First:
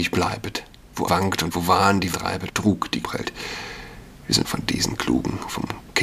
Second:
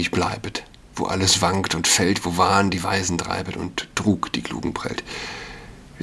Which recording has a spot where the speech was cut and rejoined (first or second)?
first